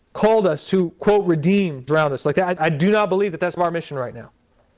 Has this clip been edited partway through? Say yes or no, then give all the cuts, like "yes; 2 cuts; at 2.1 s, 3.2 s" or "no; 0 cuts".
yes; 3 cuts; at 1.9 s, 2.6 s, 3.6 s